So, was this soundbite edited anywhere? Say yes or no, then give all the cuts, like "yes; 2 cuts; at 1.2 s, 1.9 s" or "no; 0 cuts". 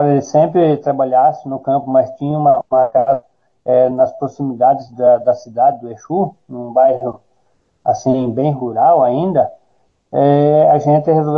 no; 0 cuts